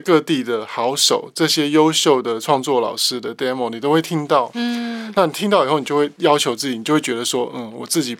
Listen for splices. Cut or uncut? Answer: uncut